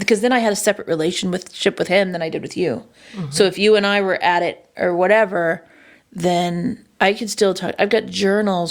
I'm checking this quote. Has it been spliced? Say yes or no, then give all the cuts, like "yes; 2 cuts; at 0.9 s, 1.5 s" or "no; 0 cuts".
no; 0 cuts